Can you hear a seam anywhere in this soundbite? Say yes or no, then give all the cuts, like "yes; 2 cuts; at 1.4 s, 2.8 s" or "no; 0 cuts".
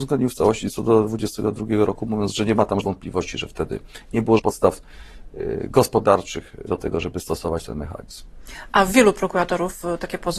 yes; 3 cuts; at 2.8 s, 4.4 s, 6.7 s